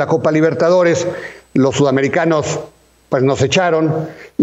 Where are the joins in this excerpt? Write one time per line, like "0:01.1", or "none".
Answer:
none